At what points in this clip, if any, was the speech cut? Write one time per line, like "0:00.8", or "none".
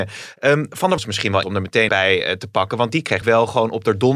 0:01.0
0:01.4
0:01.9
0:03.2